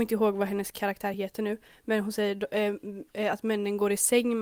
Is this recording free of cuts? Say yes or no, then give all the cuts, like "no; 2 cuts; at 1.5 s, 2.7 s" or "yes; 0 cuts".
yes; 0 cuts